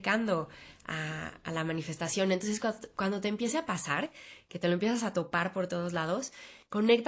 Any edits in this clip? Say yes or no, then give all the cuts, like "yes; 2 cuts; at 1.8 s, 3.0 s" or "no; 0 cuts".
no; 0 cuts